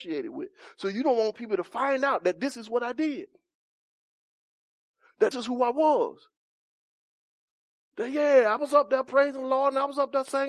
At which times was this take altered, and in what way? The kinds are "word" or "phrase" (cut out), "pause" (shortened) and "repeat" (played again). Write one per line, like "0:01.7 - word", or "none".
0:05.3 - word